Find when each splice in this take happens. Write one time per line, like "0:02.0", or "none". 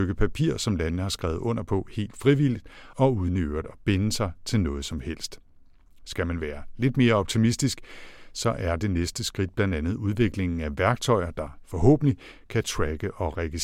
none